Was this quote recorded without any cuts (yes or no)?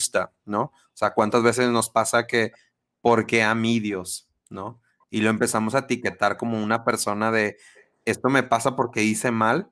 yes